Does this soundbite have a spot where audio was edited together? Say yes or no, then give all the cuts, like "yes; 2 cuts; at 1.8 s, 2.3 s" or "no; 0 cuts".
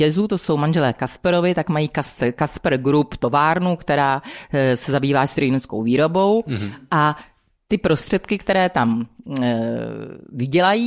no; 0 cuts